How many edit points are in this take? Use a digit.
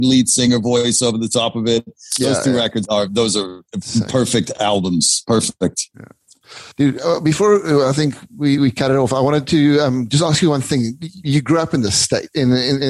3